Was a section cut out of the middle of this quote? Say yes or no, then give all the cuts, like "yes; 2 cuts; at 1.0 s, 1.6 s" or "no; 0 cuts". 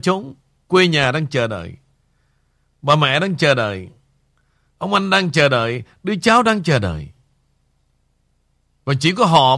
no; 0 cuts